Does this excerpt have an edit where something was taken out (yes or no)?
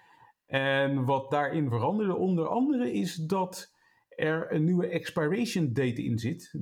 no